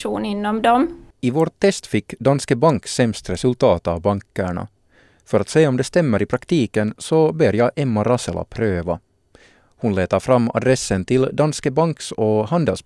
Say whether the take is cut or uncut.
uncut